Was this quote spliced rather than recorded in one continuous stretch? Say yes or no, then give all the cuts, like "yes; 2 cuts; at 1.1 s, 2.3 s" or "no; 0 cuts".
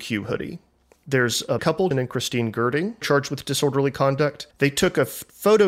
yes; 4 cuts; at 1.6 s, 1.9 s, 3.0 s, 4.5 s